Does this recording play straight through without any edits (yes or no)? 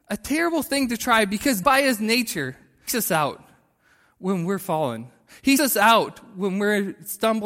no